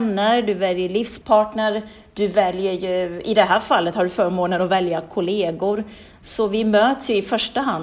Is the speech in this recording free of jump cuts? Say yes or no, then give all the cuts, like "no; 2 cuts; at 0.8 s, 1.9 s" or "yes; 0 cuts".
yes; 0 cuts